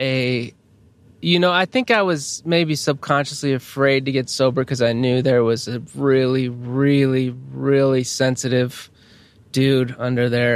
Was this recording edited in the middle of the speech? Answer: no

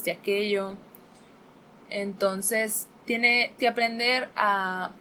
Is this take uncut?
no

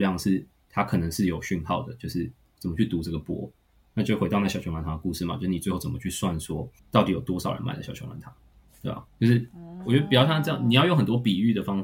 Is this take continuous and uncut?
no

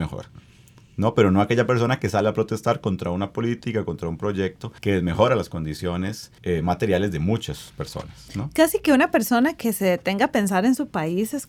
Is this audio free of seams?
no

